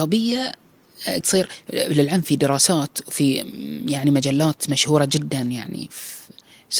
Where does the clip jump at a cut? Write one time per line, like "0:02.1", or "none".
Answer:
0:01.2